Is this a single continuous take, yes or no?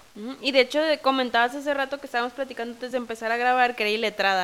yes